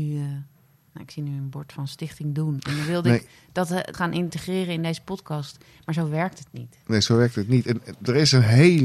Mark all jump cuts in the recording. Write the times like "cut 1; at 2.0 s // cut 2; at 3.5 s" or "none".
cut 1; at 3.9 s